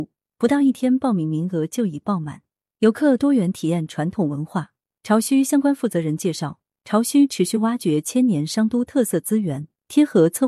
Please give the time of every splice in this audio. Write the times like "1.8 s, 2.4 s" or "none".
none